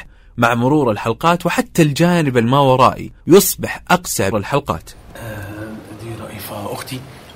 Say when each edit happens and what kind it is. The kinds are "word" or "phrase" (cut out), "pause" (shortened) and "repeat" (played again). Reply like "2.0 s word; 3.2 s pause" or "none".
3.2 s pause; 4.3 s phrase